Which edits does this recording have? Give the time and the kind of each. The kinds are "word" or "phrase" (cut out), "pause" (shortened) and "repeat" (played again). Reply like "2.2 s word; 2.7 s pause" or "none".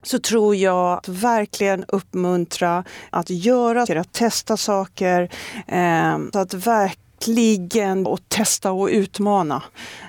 1.0 s word; 3.1 s word; 3.9 s word; 6.3 s word; 8.1 s word